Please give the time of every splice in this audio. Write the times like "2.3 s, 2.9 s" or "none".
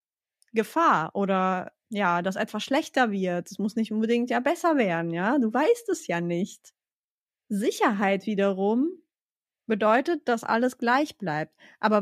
none